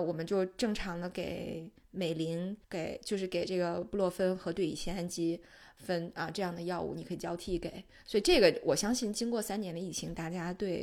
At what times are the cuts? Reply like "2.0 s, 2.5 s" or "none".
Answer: 2.6 s